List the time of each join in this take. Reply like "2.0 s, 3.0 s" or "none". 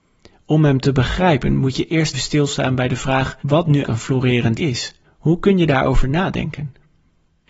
2.1 s, 3.4 s, 3.8 s, 4.6 s, 5.0 s